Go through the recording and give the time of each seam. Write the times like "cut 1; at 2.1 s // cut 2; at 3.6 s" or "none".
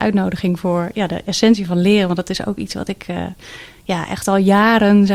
none